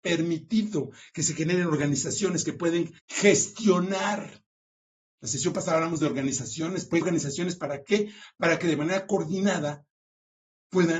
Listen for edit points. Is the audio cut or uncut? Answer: cut